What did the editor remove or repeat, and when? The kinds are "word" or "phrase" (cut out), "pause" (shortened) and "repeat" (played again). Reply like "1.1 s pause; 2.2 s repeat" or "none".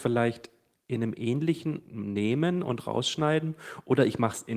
1.8 s word